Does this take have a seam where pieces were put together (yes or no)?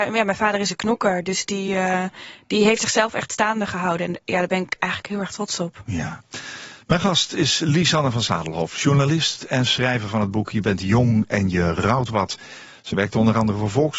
no